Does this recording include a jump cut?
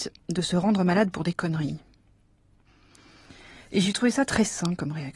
no; 0 cuts

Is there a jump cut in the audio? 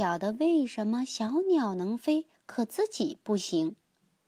no; 0 cuts

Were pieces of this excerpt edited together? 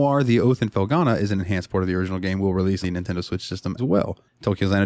yes; 2 cuts; at 2.8 s, 3.8 s

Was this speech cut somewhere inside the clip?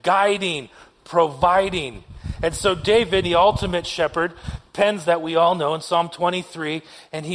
yes; 2 cuts; at 3.2 s, 5.1 s

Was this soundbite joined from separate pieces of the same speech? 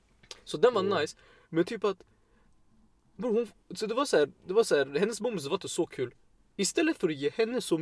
no; 0 cuts

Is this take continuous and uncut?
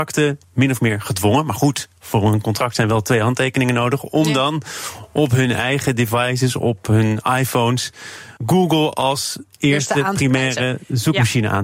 no; 1 cut; at 8.4 s

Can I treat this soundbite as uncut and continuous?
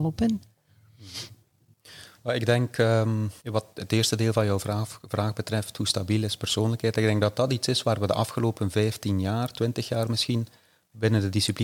no; 1 cut; at 3.4 s

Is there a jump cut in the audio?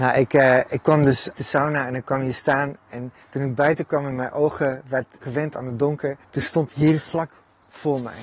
yes; 5 cuts; at 1.4 s, 3.2 s, 5.2 s, 6.2 s, 6.7 s

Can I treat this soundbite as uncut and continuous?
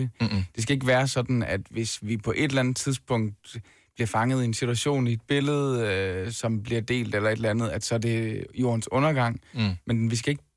yes; 0 cuts

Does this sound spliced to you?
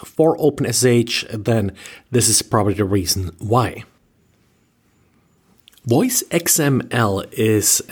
no; 0 cuts

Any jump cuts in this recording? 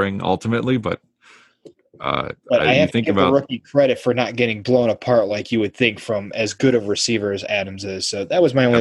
no; 0 cuts

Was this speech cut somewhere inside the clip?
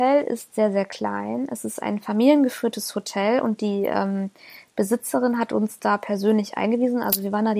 no; 0 cuts

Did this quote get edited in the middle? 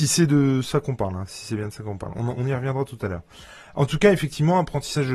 yes; 1 cut; at 2.4 s

